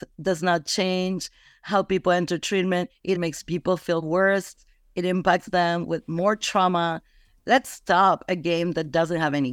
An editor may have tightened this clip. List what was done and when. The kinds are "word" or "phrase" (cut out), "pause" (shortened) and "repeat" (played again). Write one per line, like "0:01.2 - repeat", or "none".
0:03.1 - word